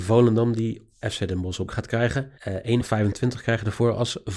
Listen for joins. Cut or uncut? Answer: cut